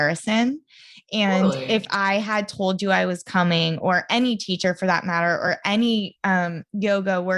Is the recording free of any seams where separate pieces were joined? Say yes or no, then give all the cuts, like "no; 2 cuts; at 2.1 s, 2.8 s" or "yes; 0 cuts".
yes; 0 cuts